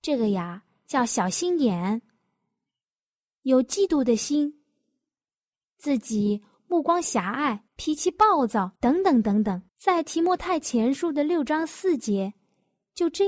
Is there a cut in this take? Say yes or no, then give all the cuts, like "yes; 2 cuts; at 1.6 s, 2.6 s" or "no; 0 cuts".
yes; 3 cuts; at 7.7 s, 8.8 s, 9.7 s